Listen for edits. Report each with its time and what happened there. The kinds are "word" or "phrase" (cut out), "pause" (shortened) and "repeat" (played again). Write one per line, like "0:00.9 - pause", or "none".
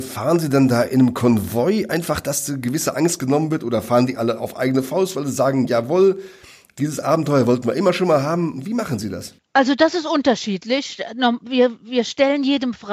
0:09.4 - pause